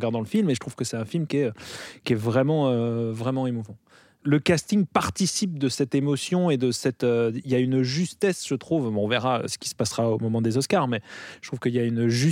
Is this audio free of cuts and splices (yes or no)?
yes